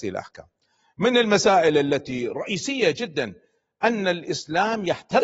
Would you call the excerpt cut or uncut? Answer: uncut